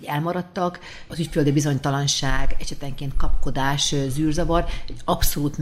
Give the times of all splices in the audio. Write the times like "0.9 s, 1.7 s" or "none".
none